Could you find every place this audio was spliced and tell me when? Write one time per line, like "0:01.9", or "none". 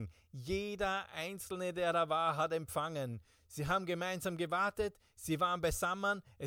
none